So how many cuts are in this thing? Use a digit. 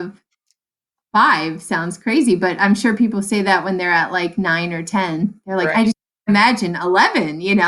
0